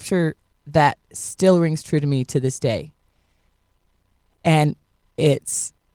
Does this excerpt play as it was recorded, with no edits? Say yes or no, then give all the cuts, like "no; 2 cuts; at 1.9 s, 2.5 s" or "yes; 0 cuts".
yes; 0 cuts